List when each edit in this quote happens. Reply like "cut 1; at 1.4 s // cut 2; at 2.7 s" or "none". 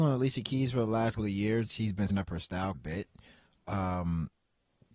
cut 1; at 1.2 s // cut 2; at 1.7 s // cut 3; at 2.1 s // cut 4; at 2.7 s